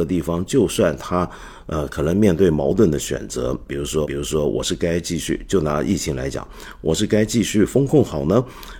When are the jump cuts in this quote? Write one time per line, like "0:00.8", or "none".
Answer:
0:04.0